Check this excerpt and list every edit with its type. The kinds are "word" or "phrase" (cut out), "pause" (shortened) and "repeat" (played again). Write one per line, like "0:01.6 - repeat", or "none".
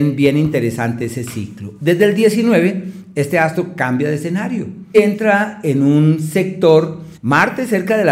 0:04.9 - word
0:07.2 - pause